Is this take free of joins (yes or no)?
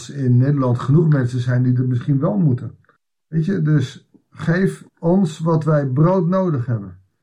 no